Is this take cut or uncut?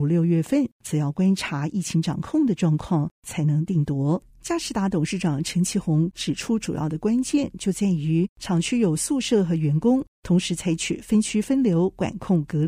cut